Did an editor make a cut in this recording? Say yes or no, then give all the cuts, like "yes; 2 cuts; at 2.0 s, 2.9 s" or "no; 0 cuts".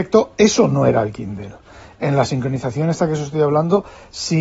no; 0 cuts